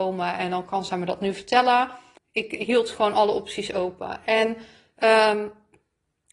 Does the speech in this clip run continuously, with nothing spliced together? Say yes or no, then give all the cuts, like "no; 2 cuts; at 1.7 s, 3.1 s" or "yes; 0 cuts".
no; 1 cut; at 2.2 s